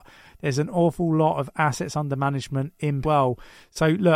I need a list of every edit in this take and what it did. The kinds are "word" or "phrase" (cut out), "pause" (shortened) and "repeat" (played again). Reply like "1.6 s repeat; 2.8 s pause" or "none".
3.0 s phrase